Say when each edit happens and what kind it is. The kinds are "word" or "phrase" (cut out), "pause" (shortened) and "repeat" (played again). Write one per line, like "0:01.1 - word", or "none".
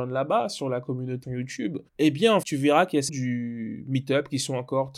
0:01.2 - word
0:01.9 - pause
0:02.4 - word
0:03.1 - word